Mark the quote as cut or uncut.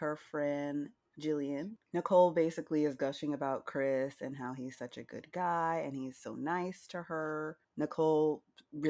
uncut